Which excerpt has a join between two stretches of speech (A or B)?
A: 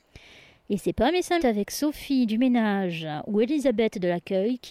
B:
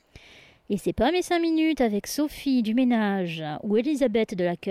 A